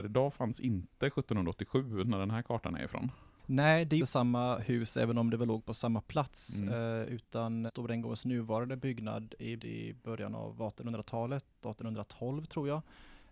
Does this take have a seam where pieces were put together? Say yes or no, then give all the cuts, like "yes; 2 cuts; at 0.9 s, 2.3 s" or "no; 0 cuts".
yes; 3 cuts; at 4.0 s, 7.7 s, 9.6 s